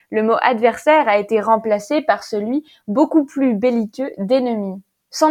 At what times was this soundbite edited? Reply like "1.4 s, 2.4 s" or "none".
none

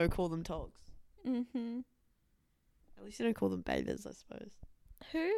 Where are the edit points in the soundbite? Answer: none

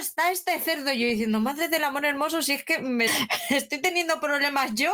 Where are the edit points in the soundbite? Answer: 3.1 s

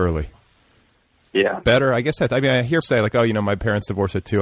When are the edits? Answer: 1.6 s, 2.8 s

